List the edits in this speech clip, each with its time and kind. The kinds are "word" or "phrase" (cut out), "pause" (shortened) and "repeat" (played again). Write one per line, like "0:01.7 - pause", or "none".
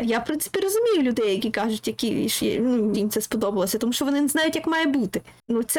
0:02.9 - phrase